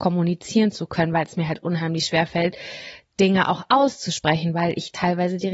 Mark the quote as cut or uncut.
uncut